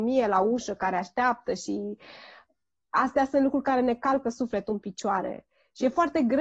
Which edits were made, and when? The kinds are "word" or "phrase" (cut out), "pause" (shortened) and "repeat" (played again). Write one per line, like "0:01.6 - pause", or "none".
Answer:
none